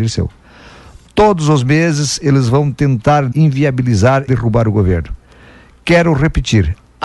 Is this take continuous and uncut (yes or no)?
no